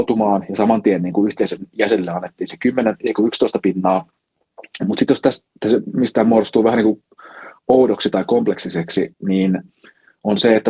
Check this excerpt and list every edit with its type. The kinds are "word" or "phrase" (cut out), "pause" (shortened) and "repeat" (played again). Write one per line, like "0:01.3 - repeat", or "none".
none